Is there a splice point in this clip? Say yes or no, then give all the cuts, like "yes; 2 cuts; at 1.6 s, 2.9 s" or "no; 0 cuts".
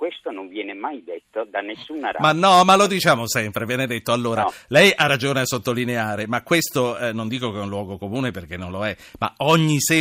no; 0 cuts